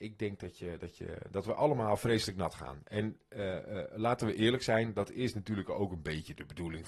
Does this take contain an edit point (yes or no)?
no